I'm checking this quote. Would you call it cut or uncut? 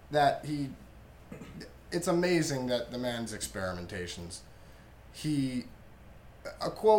cut